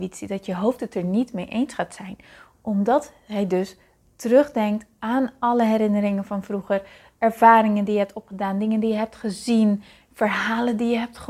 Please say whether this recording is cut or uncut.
uncut